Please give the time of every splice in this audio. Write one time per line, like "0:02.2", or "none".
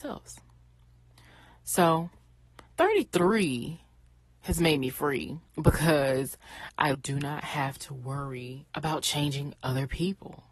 0:02.7
0:05.5
0:06.9
0:08.7